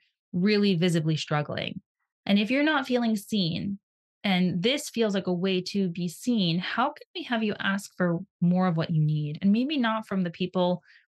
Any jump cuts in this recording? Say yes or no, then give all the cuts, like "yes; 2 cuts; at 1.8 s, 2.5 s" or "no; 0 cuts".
no; 0 cuts